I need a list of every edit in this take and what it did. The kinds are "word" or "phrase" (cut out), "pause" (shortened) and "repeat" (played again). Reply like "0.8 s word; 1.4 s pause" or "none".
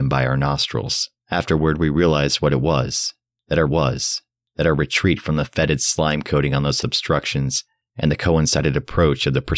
1.2 s pause; 3.7 s repeat; 6.8 s word